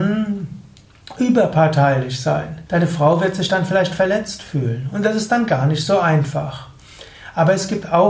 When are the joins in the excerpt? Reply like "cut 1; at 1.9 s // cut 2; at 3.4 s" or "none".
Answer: cut 1; at 2.7 s